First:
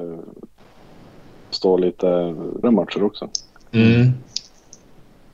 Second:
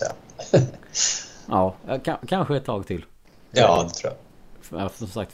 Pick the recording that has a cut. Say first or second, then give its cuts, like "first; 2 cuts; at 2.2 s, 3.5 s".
first; 2 cuts; at 1.5 s, 2.6 s